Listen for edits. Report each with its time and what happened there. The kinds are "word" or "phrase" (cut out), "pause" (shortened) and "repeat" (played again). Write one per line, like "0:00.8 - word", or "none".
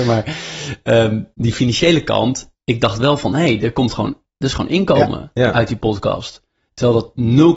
0:01.3 - pause
0:02.5 - pause

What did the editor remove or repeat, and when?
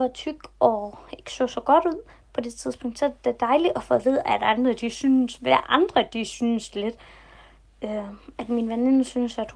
none

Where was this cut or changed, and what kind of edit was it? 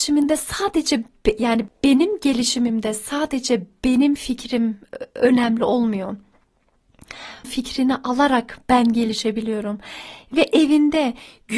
0:07.4 - word

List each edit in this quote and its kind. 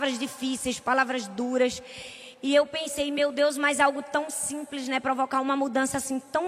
none

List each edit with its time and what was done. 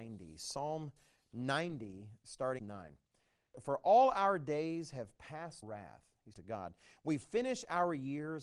0:02.6 - phrase
0:05.6 - phrase
0:06.3 - word

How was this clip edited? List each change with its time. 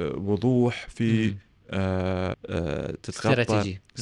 0:02.3 - word

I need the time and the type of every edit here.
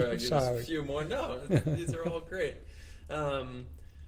none

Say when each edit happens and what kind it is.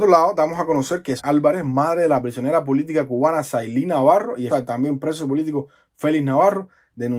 0:01.2 - word
0:04.5 - word

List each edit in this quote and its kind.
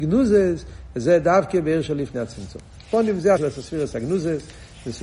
0:03.4 - word

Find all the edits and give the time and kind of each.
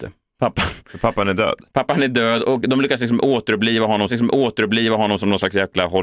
0:04.1 - repeat

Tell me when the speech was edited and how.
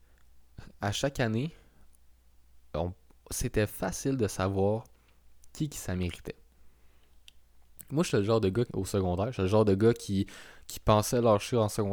0:08.7 - phrase

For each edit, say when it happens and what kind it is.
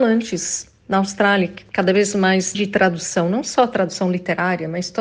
0:02.5 - word

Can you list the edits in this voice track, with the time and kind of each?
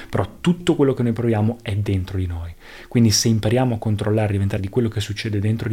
0:04.6 - word

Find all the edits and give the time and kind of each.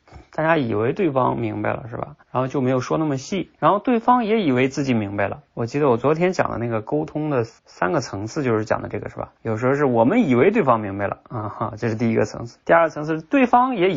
0:02.2 - pause
0:03.5 - pause
0:07.6 - pause
0:09.4 - pause
0:12.6 - pause

